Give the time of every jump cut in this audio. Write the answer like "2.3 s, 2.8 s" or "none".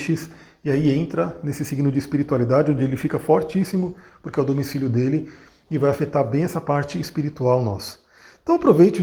none